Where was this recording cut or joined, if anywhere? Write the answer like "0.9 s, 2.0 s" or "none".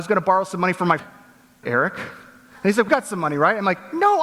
1.0 s, 1.6 s, 2.9 s